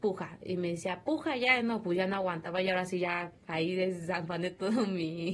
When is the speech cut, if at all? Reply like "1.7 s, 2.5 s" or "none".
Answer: 3.4 s